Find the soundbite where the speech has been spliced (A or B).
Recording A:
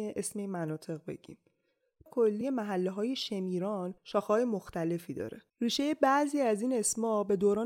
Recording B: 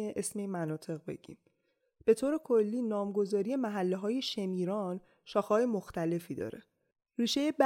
A